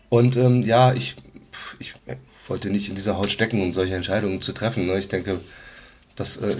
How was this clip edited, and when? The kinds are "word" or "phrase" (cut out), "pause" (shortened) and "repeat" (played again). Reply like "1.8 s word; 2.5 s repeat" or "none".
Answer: 2.0 s pause